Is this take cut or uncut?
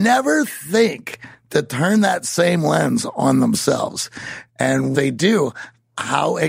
cut